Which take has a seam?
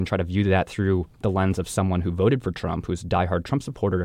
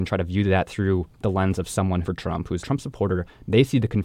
second; 2 cuts; at 2.0 s, 2.6 s

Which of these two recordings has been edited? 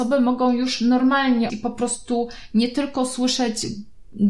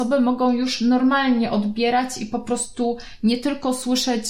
first; 1 cut; at 1.5 s

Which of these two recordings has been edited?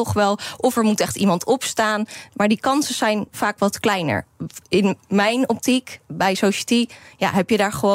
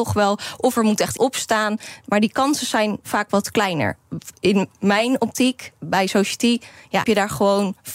second; 2 cuts; at 1.2 s, 7.0 s

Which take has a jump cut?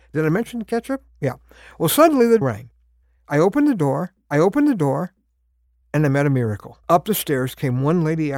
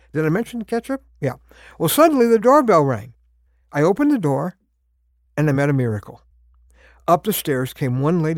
first; 3 cuts; at 2.4 s, 4.3 s, 6.8 s

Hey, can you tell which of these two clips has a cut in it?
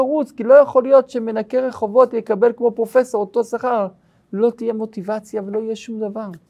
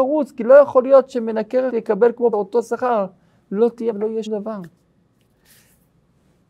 second; 4 cuts; at 1.7 s, 2.3 s, 3.9 s, 4.3 s

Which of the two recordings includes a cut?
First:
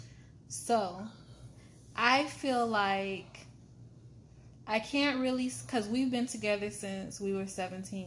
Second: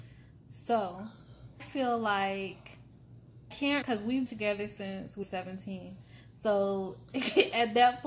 second; 5 cuts; at 1.6 s, 3.5 s, 3.8 s, 4.3 s, 5.2 s

